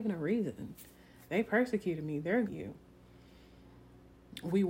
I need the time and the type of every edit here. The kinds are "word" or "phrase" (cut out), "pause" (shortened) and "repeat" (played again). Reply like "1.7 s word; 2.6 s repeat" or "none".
2.4 s phrase